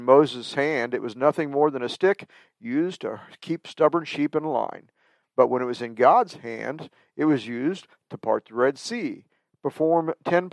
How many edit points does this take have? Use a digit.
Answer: 0